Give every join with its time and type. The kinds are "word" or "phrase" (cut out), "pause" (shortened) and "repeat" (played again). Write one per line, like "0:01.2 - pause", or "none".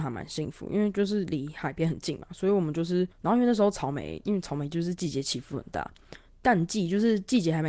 0:03.1 - pause